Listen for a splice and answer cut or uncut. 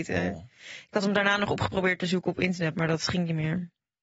uncut